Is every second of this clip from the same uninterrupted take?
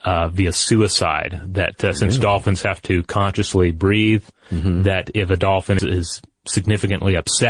no; 1 cut; at 5.8 s

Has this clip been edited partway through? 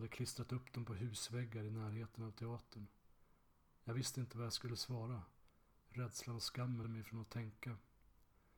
yes; 1 cut; at 6.8 s

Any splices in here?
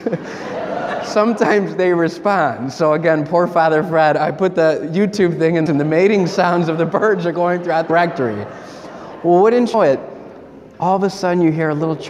yes; 3 cuts; at 5.7 s, 7.9 s, 9.7 s

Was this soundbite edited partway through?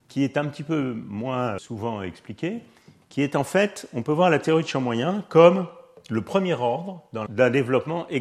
yes; 2 cuts; at 1.6 s, 7.3 s

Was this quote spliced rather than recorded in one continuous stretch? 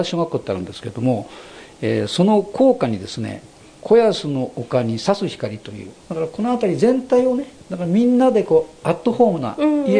yes; 2 cuts; at 6.0 s, 7.6 s

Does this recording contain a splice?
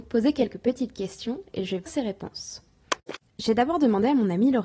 yes; 1 cut; at 1.9 s

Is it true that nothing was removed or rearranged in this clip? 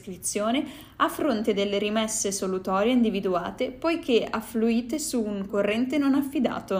no; 1 cut; at 5.5 s

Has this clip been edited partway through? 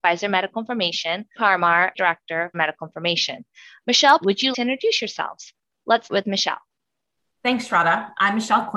yes; 6 cuts; at 1.3 s, 1.9 s, 2.5 s, 4.2 s, 4.5 s, 6.1 s

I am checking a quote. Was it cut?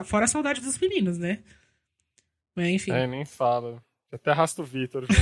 no; 0 cuts

